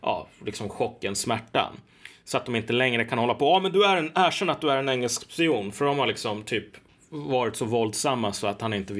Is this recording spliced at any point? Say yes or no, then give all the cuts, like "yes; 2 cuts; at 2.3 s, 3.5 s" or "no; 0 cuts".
no; 0 cuts